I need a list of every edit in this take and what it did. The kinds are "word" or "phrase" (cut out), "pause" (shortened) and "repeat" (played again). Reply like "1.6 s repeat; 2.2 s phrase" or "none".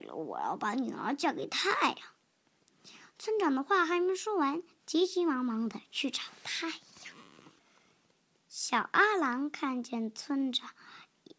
none